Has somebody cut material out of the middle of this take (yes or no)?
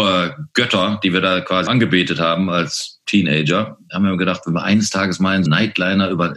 yes